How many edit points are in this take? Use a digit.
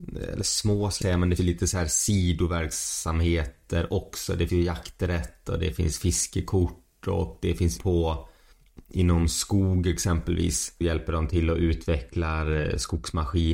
5